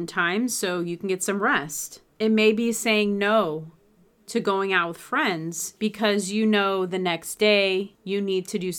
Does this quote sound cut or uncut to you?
uncut